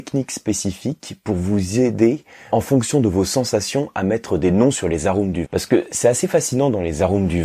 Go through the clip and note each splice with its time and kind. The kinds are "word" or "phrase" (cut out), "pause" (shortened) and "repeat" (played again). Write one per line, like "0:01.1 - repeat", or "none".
0:02.5 - word
0:05.4 - word